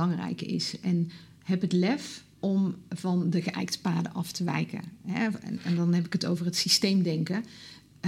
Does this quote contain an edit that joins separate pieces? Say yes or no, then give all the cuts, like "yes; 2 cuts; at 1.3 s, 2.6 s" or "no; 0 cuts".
yes; 1 cut; at 2.3 s